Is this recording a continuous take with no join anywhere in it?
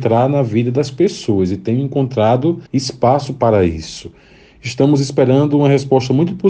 no; 1 cut; at 2.7 s

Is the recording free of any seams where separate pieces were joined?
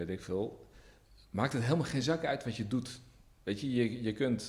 yes; 0 cuts

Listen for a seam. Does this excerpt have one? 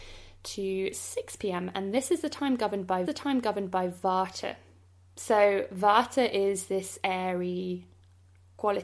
yes; 1 cut; at 3.1 s

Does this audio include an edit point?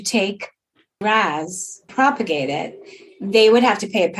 yes; 2 cuts; at 1.0 s, 1.9 s

